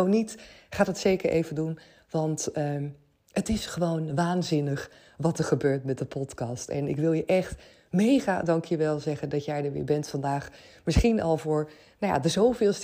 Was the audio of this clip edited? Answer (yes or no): no